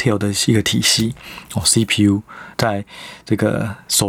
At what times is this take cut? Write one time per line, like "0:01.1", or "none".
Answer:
0:02.5

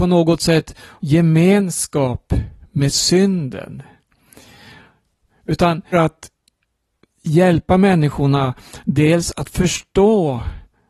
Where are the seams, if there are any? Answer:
0:01.0
0:05.9

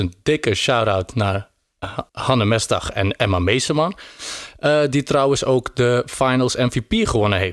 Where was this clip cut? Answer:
0:02.1

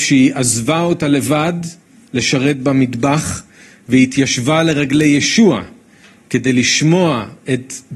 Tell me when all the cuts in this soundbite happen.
none

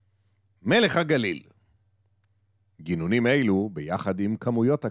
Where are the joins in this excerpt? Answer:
none

